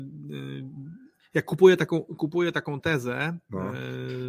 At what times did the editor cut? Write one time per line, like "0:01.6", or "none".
none